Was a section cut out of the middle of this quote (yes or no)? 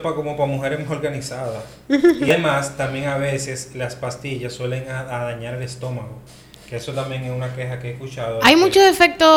no